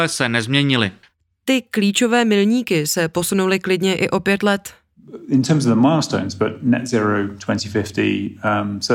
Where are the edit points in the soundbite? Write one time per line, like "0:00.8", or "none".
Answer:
none